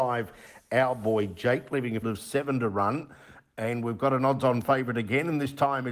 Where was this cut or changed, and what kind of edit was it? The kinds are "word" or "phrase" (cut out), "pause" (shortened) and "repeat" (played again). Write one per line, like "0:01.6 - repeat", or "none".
0:02.0 - word